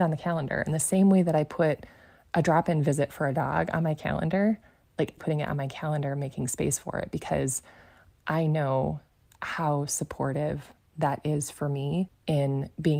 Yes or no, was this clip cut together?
yes